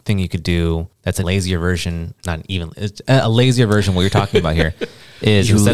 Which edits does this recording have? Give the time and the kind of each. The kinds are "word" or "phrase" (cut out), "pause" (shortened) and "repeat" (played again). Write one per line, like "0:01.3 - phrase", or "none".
0:01.2 - word
0:02.1 - word